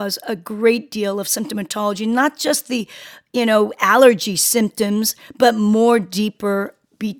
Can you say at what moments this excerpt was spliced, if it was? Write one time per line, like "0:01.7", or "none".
none